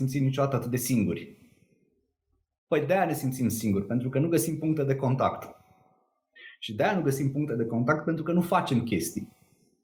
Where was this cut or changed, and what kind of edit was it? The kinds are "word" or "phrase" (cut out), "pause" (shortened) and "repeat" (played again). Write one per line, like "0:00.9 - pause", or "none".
none

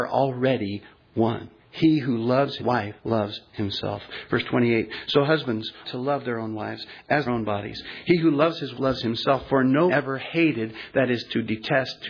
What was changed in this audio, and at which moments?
0:01.6 - pause
0:02.6 - word
0:03.0 - pause
0:05.8 - word
0:07.3 - word
0:08.7 - word
0:09.9 - word

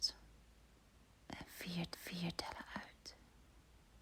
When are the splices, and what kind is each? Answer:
0:01.9 - repeat

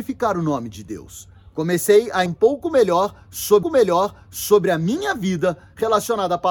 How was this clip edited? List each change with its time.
0:02.3 - word
0:03.6 - repeat

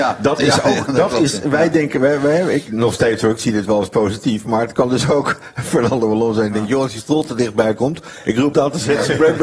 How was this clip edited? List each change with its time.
0:08.5 - word

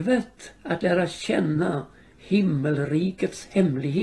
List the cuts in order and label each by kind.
none

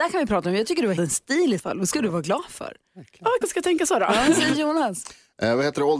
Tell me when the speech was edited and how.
0:01.0 - word
0:01.6 - word
0:03.4 - word

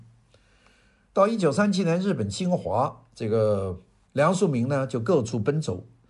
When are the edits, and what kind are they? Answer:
0:04.0 - pause

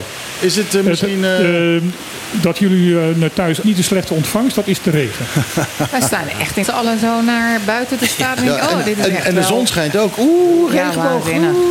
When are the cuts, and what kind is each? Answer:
0:03.6 - phrase
0:06.6 - phrase

